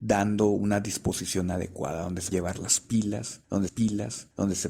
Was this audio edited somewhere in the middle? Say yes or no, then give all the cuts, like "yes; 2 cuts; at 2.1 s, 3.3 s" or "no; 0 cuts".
yes; 2 cuts; at 2.3 s, 3.7 s